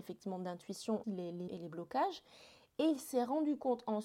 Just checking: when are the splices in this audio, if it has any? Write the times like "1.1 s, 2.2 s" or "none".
1.0 s, 1.5 s